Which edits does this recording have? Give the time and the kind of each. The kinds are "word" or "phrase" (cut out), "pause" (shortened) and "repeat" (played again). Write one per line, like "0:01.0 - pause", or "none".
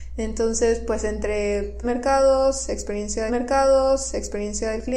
0:01.8 - word
0:03.3 - repeat